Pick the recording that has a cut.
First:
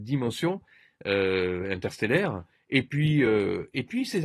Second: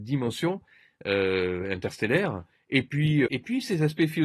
second; 1 cut; at 3.3 s

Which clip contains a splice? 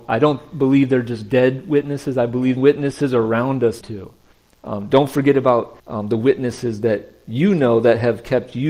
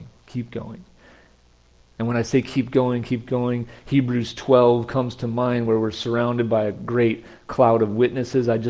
first; 4 cuts; at 2.6 s, 3.8 s, 4.3 s, 5.8 s

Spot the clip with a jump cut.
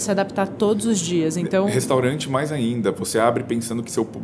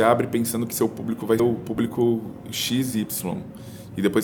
second; 1 cut; at 1.4 s

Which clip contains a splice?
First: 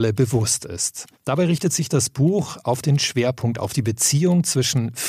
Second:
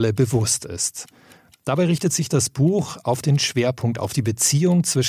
first; 1 cut; at 1.1 s

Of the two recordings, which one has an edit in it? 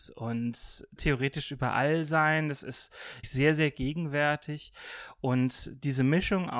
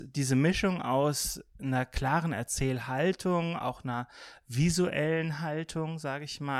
first; 2 cuts; at 1.0 s, 3.2 s

